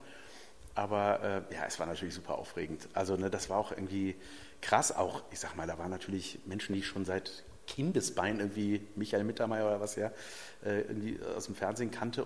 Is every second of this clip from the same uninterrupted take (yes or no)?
yes